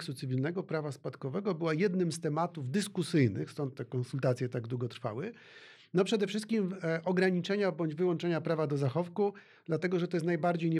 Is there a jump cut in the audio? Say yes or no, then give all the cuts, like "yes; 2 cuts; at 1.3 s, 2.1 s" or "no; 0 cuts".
no; 0 cuts